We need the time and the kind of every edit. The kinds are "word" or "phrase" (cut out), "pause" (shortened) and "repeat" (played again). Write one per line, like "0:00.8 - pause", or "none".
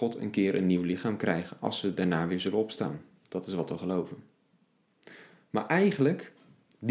none